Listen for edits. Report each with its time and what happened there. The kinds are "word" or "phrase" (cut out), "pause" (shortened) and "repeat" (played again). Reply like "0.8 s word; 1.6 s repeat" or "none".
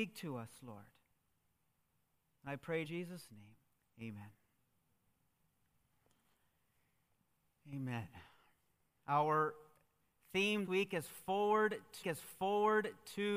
2.8 s word; 3.7 s pause; 10.7 s word; 12.0 s repeat